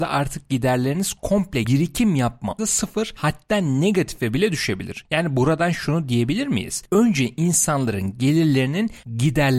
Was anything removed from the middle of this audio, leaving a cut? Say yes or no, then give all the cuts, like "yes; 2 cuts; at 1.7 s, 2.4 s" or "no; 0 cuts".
yes; 2 cuts; at 1.6 s, 2.6 s